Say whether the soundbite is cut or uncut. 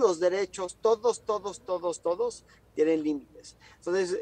uncut